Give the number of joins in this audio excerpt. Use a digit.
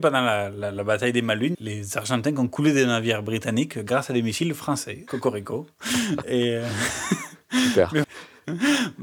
3